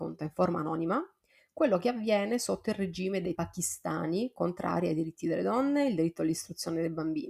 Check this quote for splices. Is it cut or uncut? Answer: cut